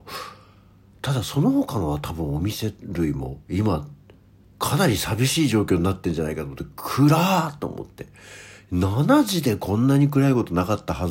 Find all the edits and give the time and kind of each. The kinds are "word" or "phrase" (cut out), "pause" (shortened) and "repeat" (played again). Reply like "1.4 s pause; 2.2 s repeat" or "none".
3.4 s pause